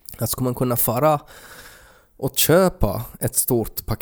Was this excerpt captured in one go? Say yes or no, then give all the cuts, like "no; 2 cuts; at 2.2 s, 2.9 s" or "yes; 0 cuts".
yes; 0 cuts